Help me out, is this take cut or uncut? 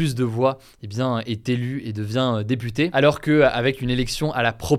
uncut